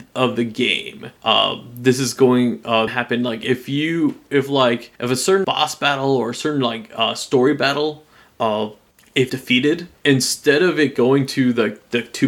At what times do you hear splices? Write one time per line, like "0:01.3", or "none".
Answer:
0:01.2
0:02.9
0:05.0
0:05.4
0:09.3
0:10.0